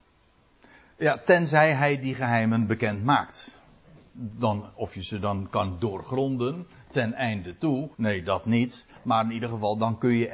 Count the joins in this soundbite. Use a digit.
1